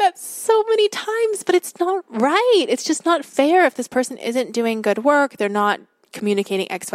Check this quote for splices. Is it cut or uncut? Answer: cut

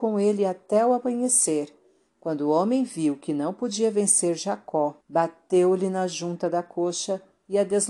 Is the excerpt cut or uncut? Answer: cut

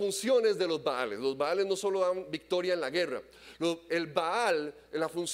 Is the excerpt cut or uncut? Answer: uncut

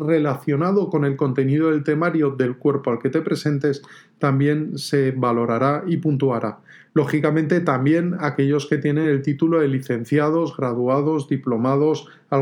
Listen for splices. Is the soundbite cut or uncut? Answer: uncut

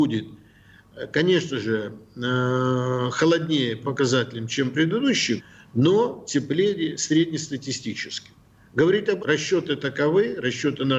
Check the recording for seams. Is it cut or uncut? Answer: cut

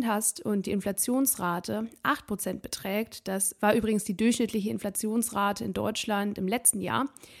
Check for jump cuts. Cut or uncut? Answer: uncut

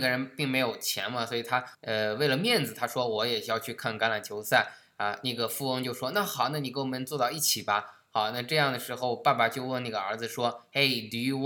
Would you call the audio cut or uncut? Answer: cut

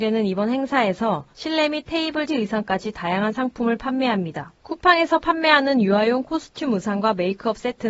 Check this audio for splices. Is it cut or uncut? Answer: cut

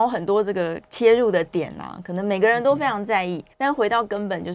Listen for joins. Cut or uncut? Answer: cut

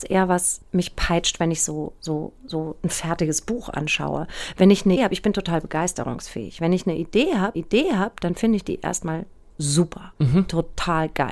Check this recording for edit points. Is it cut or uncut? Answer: cut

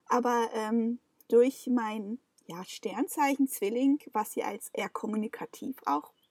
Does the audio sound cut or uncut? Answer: uncut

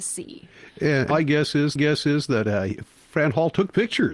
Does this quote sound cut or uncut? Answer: cut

